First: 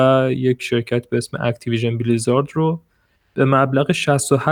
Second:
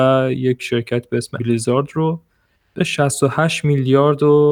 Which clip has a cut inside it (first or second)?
second